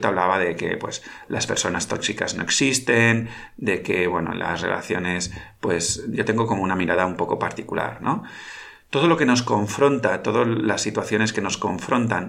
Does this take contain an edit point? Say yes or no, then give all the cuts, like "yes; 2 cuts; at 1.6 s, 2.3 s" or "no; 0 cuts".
no; 0 cuts